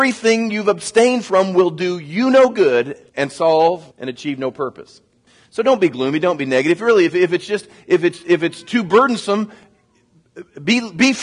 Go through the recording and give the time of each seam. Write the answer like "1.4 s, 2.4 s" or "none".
3.1 s, 3.9 s, 5.3 s